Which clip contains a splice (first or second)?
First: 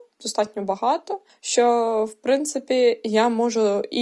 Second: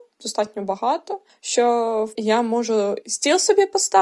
second